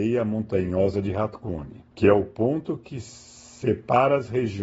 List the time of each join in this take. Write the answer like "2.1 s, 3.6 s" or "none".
1.9 s